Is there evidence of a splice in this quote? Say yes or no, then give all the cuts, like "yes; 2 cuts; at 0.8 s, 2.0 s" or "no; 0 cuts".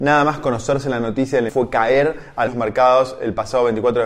yes; 2 cuts; at 1.5 s, 2.5 s